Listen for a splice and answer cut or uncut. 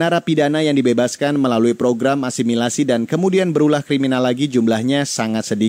uncut